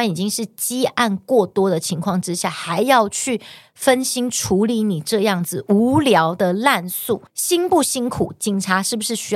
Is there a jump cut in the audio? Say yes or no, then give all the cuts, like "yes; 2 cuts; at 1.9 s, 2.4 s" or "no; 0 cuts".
yes; 1 cut; at 7.3 s